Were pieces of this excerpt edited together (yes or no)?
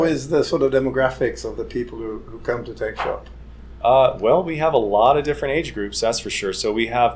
no